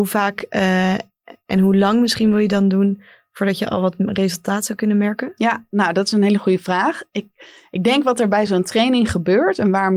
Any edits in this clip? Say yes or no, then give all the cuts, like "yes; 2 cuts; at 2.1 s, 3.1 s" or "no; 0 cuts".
no; 0 cuts